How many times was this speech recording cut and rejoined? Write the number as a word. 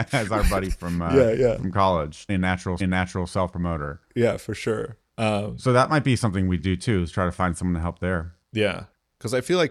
five